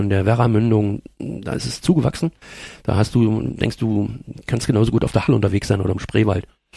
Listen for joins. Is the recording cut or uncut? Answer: cut